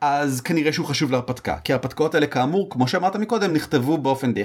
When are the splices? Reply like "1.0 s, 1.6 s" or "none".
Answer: none